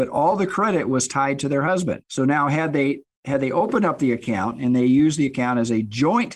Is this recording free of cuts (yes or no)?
no